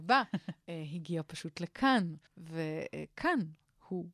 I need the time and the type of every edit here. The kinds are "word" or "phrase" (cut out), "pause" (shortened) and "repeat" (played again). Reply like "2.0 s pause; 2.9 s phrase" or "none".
2.3 s pause